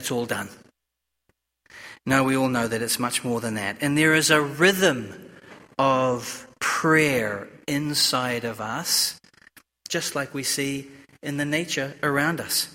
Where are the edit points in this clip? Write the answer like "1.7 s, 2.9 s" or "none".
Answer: none